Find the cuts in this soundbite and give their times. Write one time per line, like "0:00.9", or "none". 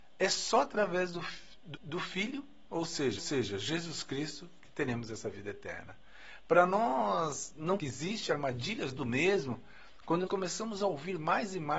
0:01.7
0:03.2
0:07.8
0:09.0
0:10.3